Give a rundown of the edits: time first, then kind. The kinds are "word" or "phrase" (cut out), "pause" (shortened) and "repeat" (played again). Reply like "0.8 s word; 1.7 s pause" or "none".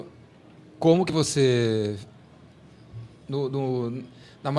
none